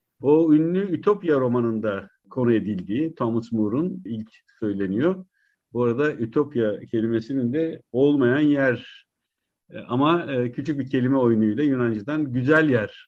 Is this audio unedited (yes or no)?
yes